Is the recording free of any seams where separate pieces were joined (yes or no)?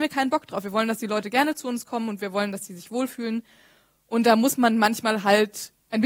yes